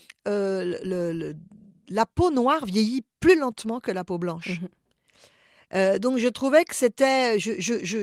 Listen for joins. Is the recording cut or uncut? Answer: uncut